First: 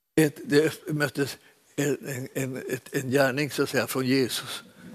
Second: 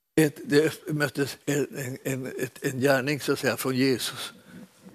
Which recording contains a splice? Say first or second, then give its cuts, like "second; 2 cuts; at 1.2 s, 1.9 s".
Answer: second; 1 cut; at 1.4 s